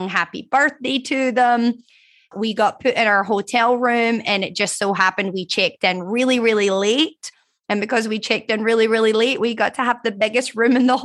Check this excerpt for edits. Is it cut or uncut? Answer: uncut